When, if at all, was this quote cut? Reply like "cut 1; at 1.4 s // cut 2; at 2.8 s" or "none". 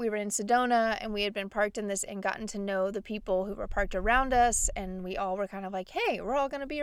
cut 1; at 2.1 s